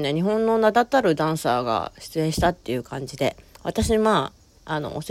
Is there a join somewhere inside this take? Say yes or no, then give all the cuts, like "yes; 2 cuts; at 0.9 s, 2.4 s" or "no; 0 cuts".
yes; 1 cut; at 3.4 s